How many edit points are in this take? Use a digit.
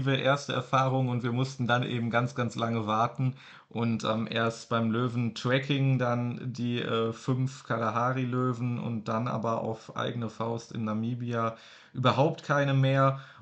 0